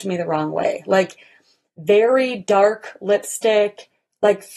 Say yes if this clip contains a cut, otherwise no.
no